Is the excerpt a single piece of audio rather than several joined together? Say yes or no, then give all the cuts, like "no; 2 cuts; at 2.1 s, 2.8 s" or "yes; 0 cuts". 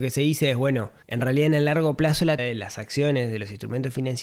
no; 2 cuts; at 1.0 s, 2.4 s